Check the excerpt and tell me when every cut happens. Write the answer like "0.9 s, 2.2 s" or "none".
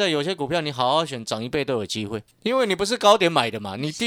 2.3 s